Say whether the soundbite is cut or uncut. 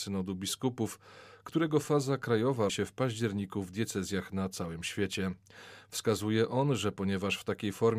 cut